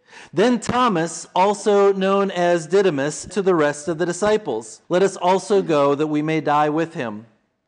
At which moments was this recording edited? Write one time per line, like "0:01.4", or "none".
0:03.3
0:04.8